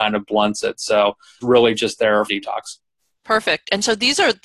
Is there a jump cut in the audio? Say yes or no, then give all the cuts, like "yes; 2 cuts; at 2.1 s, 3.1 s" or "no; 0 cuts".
yes; 2 cuts; at 1.4 s, 2.3 s